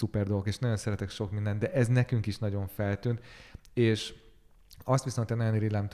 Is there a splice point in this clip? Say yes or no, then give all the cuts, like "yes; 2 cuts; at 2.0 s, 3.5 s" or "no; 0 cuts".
no; 0 cuts